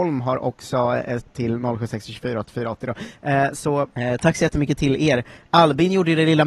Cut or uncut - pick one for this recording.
cut